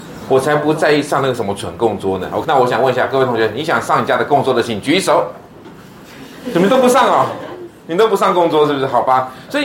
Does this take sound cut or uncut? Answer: cut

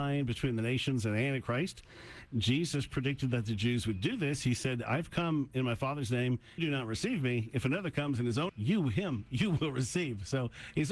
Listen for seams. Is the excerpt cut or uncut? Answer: cut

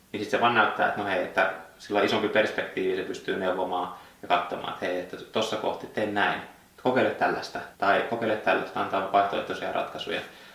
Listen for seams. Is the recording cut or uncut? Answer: cut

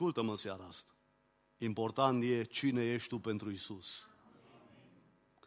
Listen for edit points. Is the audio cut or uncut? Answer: uncut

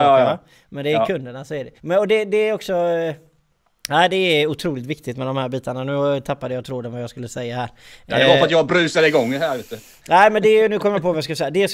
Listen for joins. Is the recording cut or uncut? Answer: cut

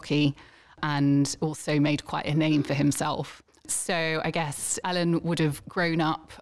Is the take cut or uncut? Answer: cut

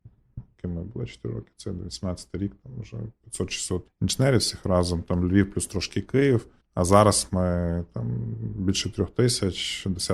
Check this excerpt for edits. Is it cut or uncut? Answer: cut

